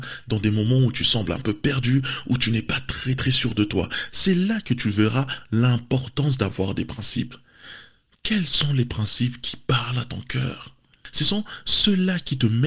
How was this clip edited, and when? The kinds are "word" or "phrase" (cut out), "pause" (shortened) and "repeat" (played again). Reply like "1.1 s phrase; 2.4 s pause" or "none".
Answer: none

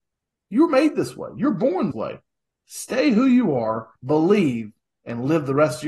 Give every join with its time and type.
1.9 s word; 4.0 s pause

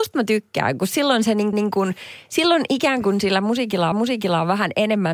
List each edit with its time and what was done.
1.5 s repeat; 3.9 s repeat

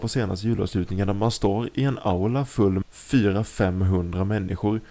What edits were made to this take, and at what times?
2.8 s word

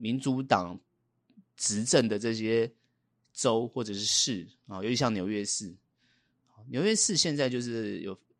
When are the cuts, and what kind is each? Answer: none

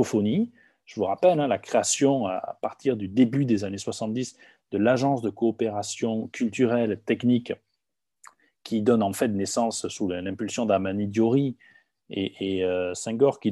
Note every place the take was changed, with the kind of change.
none

